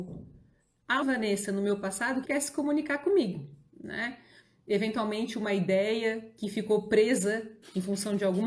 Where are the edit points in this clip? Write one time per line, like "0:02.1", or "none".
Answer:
0:01.0
0:02.2

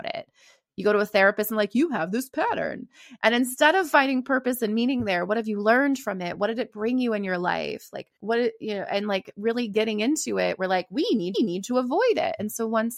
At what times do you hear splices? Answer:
0:08.2
0:11.3

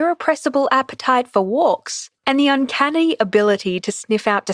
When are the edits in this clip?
0:02.2

